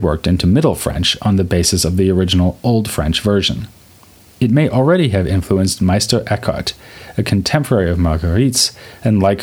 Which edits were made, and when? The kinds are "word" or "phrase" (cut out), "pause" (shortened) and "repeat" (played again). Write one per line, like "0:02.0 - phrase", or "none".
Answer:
none